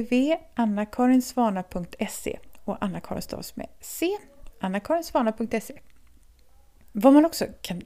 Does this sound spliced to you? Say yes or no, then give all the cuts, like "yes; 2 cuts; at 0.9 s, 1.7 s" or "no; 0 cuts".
no; 0 cuts